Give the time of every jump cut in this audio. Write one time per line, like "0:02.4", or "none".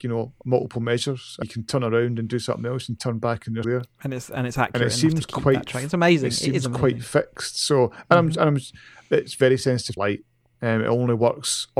0:01.4
0:03.6
0:10.0